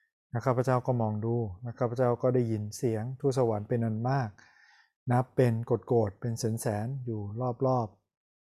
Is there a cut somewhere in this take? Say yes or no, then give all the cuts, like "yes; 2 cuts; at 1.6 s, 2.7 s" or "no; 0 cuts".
no; 0 cuts